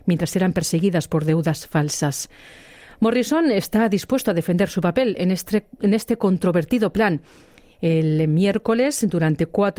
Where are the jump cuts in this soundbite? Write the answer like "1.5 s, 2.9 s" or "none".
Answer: none